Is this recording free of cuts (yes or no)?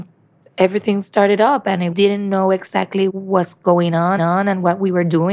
no